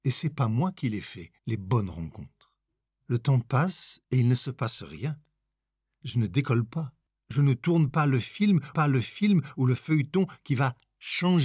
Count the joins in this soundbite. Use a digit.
5